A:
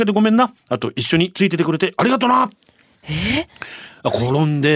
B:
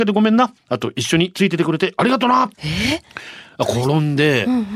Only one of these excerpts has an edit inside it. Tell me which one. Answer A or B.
B